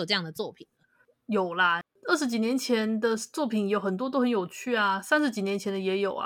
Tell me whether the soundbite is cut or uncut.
uncut